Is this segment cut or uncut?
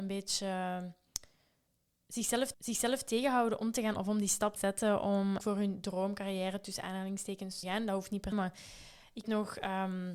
cut